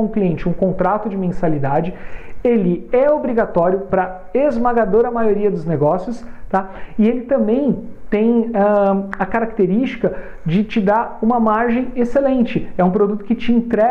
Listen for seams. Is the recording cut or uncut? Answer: uncut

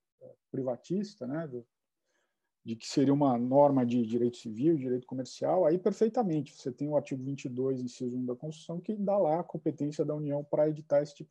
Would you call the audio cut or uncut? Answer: uncut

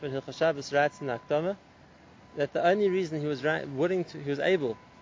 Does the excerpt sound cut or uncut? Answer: uncut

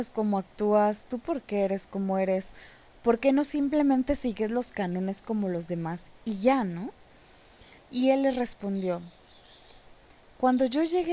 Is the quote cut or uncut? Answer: uncut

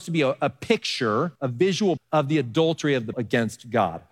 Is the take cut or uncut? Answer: cut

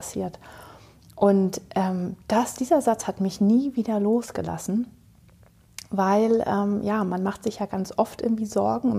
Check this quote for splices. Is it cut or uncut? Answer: uncut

